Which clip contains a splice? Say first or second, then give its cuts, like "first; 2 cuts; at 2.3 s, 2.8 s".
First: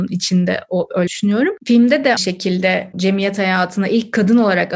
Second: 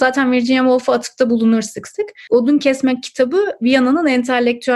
first; 3 cuts; at 1.1 s, 2.2 s, 2.9 s